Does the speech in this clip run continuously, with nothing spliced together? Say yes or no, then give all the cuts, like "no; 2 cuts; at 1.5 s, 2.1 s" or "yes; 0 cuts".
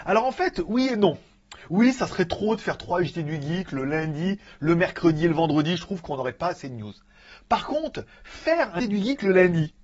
no; 1 cut; at 8.8 s